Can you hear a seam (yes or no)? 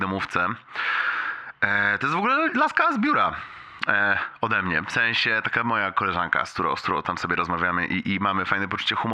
no